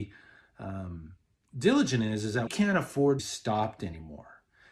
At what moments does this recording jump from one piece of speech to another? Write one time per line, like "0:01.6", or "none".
0:01.4
0:02.5
0:03.2